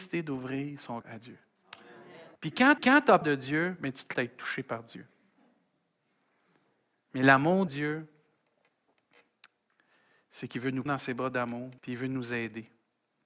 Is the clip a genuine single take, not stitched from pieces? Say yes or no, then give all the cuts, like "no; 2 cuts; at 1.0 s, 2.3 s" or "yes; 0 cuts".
no; 8 cuts; at 1.0 s, 2.4 s, 2.8 s, 3.2 s, 4.1 s, 7.7 s, 10.9 s, 11.8 s